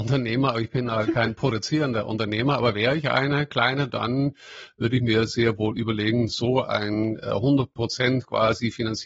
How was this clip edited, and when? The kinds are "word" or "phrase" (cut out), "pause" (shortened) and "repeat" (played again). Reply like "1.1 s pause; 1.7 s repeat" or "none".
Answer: none